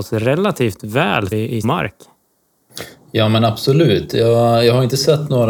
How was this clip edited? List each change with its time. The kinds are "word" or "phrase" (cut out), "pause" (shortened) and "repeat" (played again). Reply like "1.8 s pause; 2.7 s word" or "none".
1.3 s phrase; 1.6 s phrase